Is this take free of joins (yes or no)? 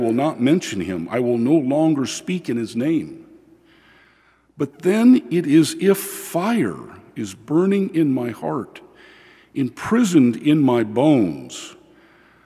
yes